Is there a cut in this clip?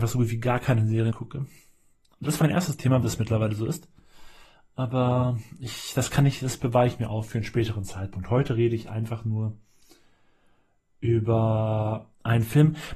yes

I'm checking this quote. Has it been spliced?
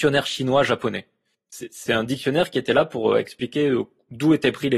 no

